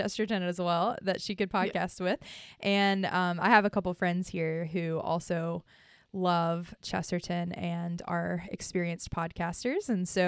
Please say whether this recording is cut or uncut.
uncut